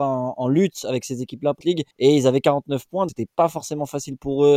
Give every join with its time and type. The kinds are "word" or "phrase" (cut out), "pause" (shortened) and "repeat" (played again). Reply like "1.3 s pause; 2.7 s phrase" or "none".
1.6 s phrase; 1.9 s pause; 3.1 s word